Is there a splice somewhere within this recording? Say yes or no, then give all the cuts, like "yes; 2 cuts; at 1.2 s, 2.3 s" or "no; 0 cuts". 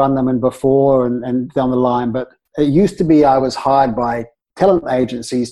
no; 0 cuts